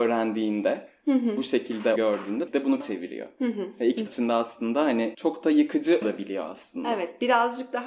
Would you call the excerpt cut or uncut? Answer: cut